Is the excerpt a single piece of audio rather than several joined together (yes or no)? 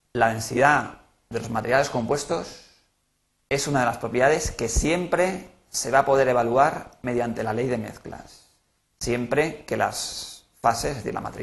yes